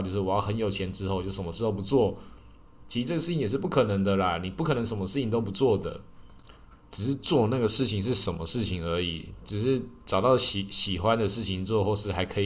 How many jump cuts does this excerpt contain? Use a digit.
0